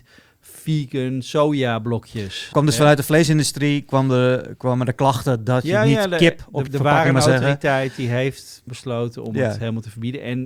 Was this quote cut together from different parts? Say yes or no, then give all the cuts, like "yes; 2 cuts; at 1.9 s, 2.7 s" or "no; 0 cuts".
yes; 3 cuts; at 2.5 s, 6.7 s, 8.7 s